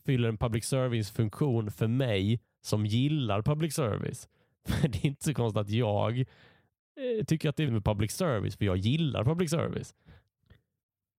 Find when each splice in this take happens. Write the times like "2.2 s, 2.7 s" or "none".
7.7 s